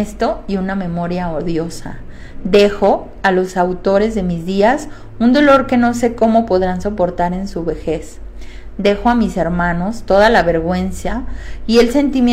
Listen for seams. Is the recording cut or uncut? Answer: uncut